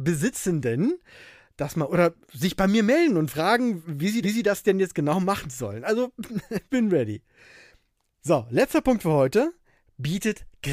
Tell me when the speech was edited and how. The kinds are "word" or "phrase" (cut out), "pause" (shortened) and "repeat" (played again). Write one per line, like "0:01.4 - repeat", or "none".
0:01.9 - word
0:02.2 - pause
0:04.2 - repeat
0:06.7 - phrase